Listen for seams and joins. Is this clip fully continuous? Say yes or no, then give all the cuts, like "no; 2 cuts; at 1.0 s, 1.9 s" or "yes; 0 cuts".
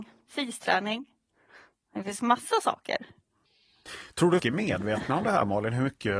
no; 1 cut; at 4.4 s